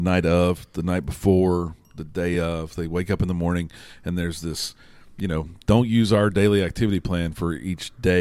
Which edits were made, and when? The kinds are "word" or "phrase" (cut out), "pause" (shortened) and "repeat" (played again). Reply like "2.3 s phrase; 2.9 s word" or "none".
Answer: none